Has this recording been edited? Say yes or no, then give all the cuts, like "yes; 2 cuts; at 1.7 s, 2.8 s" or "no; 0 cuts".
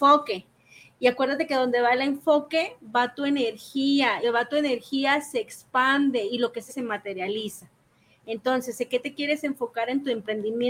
yes; 2 cuts; at 4.2 s, 6.7 s